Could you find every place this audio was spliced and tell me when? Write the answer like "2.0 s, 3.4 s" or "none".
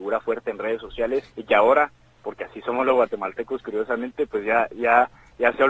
1.3 s